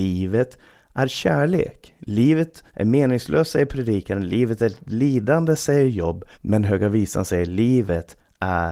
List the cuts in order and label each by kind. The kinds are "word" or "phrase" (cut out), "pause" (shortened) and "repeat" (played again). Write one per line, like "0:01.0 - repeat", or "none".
0:02.7 - pause
0:06.3 - pause